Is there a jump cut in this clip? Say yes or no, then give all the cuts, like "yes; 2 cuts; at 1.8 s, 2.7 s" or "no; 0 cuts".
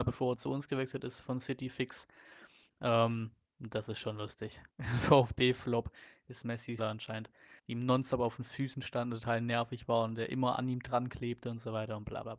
yes; 3 cuts; at 4.7 s, 6.8 s, 7.6 s